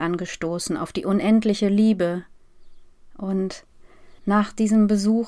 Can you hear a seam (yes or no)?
yes